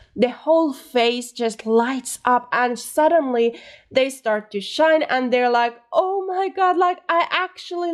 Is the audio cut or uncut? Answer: uncut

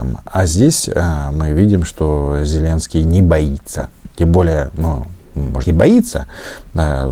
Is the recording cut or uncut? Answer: cut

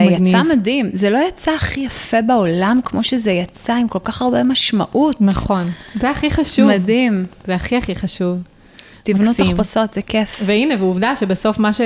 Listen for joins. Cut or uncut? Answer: uncut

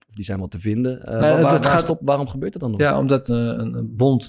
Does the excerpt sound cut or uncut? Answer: cut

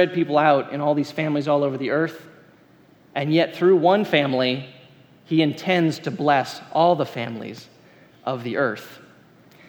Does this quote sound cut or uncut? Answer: uncut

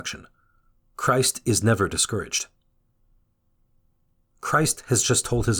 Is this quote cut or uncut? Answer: uncut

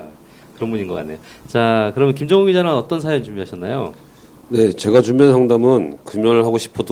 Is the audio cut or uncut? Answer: uncut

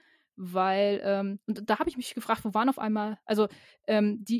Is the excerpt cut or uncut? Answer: uncut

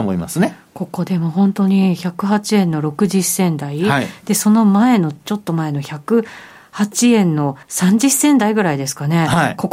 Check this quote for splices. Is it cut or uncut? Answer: cut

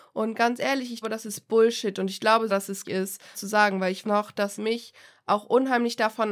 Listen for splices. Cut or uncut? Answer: cut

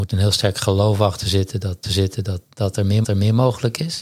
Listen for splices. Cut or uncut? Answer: cut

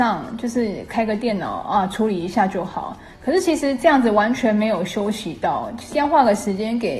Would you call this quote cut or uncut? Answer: uncut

